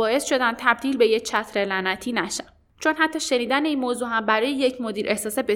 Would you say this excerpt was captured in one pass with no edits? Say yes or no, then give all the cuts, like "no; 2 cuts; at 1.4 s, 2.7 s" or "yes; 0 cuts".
yes; 0 cuts